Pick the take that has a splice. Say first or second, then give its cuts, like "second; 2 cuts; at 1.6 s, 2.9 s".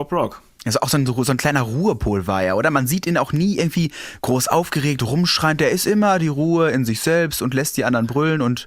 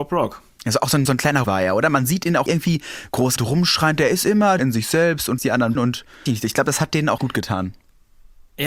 second; 9 cuts; at 1.1 s, 1.4 s, 2.5 s, 3.4 s, 4.6 s, 5.4 s, 5.8 s, 6.3 s, 7.2 s